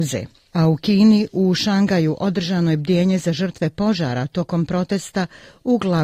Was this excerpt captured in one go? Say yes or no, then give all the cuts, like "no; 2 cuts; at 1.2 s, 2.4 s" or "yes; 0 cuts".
yes; 0 cuts